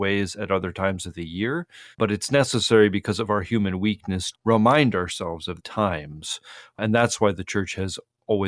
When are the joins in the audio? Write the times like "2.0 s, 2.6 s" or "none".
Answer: 1.9 s, 4.3 s, 5.6 s